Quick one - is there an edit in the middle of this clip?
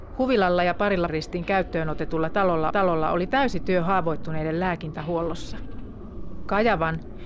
yes; 2 cuts; at 1.1 s, 2.7 s

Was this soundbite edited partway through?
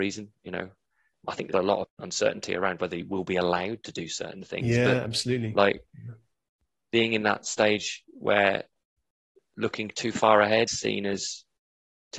yes; 3 cuts; at 1.5 s, 1.8 s, 10.7 s

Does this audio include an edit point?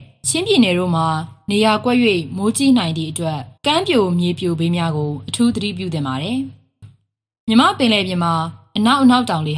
yes; 1 cut; at 3.6 s

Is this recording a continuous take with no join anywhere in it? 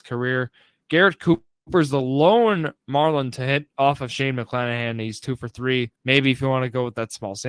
no; 2 cuts; at 2.8 s, 6.0 s

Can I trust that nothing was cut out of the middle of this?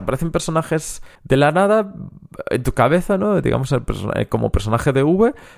no; 1 cut; at 1.1 s

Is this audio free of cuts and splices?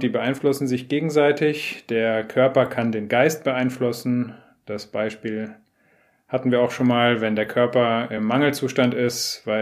yes; 0 cuts

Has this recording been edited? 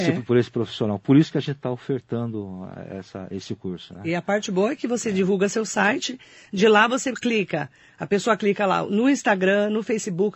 no; 0 cuts

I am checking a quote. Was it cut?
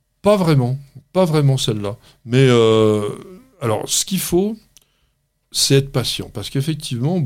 no; 0 cuts

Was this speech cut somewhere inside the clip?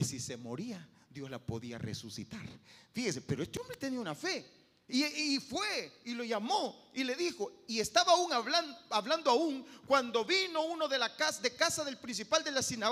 no; 0 cuts

